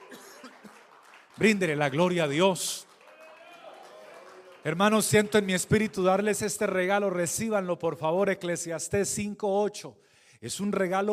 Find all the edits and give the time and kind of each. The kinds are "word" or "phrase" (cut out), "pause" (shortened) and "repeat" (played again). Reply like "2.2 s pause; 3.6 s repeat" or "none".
none